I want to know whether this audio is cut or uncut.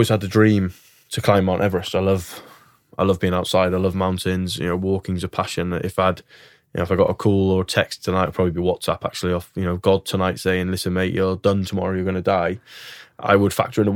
uncut